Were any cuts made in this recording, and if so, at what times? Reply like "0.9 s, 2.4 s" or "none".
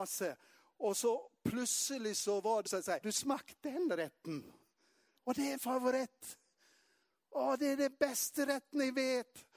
2.7 s, 3.0 s, 5.6 s